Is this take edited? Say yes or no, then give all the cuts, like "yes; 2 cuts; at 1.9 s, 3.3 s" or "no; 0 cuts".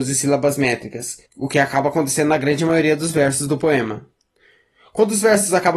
yes; 1 cut; at 1.2 s